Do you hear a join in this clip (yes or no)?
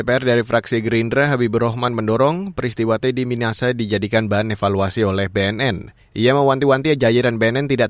no